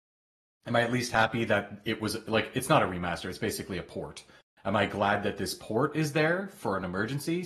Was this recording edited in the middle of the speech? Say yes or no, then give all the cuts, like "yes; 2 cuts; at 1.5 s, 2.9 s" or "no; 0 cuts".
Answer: no; 0 cuts